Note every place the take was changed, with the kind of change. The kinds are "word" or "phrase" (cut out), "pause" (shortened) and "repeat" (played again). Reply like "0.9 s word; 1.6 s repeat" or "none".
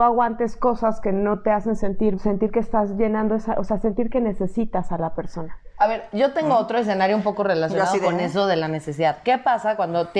2.1 s phrase